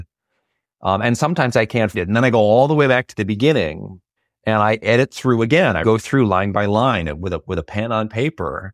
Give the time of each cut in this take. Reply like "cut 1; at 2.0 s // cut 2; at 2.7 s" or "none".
cut 1; at 1.9 s // cut 2; at 4.2 s // cut 3; at 5.8 s